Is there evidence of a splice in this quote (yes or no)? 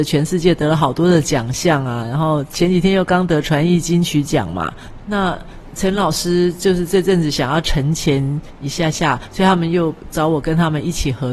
yes